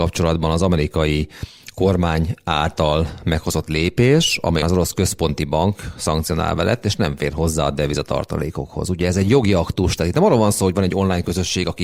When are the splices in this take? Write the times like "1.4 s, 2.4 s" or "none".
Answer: 4.6 s